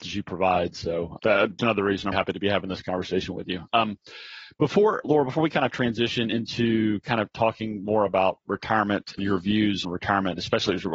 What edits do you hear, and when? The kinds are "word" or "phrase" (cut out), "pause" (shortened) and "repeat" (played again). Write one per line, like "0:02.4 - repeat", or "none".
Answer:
0:01.2 - word
0:01.6 - word
0:02.1 - word
0:05.0 - word
0:09.2 - word
0:09.8 - word